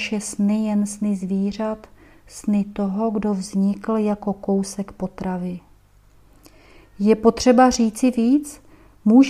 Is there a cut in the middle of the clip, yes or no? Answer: no